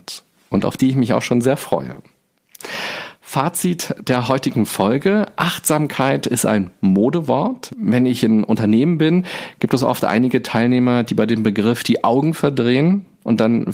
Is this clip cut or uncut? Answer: uncut